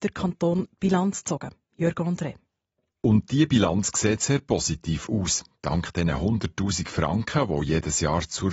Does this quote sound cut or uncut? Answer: uncut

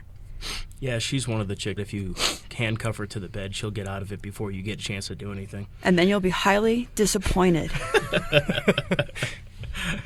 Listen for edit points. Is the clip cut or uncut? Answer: cut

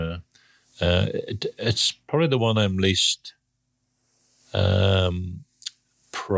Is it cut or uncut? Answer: uncut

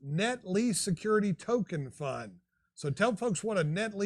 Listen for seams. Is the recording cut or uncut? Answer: uncut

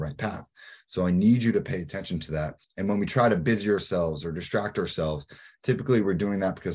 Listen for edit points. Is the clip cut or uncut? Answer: cut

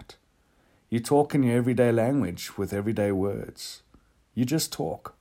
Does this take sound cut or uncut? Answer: uncut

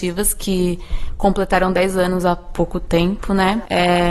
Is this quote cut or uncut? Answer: uncut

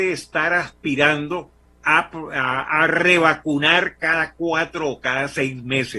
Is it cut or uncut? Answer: cut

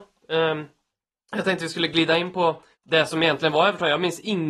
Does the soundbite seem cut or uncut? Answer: cut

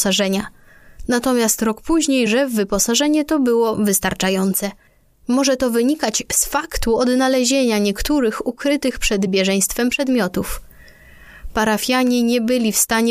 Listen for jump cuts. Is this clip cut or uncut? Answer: uncut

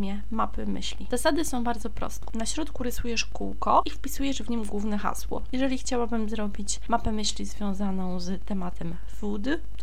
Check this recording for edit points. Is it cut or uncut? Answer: uncut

